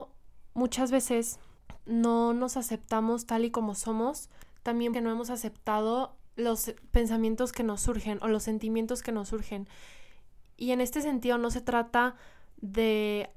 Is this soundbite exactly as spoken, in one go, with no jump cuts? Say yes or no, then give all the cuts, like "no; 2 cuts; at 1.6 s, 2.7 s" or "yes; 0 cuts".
no; 2 cuts; at 1.8 s, 4.9 s